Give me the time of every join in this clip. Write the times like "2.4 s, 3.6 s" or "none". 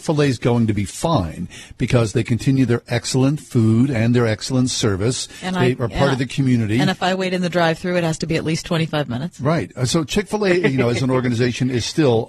none